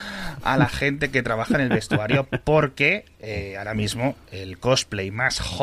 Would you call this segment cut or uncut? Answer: uncut